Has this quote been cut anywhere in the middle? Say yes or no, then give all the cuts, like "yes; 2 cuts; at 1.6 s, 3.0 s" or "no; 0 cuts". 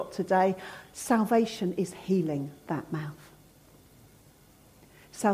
no; 0 cuts